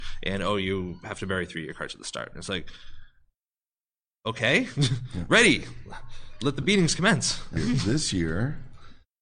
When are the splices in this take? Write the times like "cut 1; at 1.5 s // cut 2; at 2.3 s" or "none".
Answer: cut 1; at 7.6 s